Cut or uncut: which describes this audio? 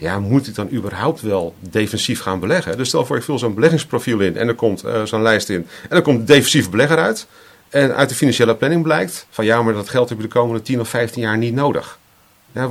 cut